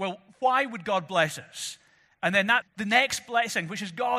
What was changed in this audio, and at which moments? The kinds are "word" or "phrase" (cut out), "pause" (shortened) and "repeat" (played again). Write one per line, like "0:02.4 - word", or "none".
0:02.6 - phrase